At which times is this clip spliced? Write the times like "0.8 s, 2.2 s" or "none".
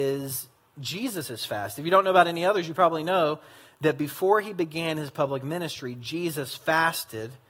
none